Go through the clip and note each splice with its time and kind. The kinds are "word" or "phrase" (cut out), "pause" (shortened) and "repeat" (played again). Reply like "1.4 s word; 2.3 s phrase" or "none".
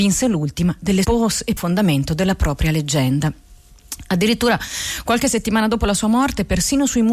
1.0 s phrase; 1.6 s phrase

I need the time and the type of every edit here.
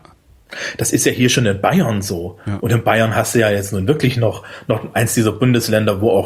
none

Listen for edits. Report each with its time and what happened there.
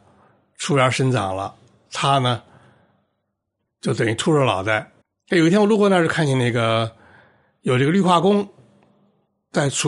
5.0 s pause

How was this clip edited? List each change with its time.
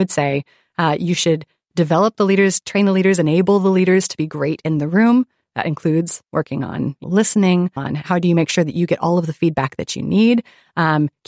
7.0 s word; 7.8 s word

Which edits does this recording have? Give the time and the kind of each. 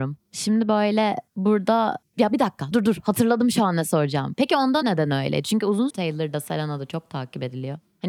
1.3 s pause; 2.7 s word; 4.8 s word; 5.9 s word

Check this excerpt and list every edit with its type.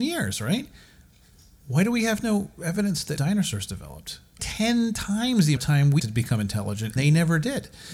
3.2 s word; 4.4 s phrase; 5.6 s word; 6.0 s word; 7.0 s word

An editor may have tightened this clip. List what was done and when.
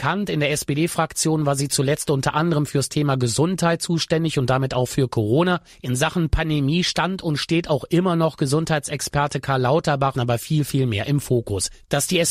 10.1 s phrase

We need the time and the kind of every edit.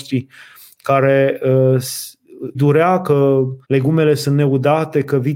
2.5 s word; 3.6 s pause

